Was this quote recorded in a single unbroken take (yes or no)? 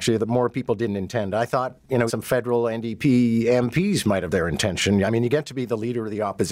no